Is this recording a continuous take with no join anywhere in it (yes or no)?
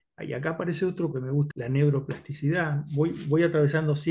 no